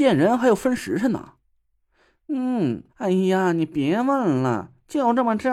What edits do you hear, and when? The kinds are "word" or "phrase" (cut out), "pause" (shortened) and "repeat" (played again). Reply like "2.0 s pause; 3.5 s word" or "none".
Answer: 2.9 s pause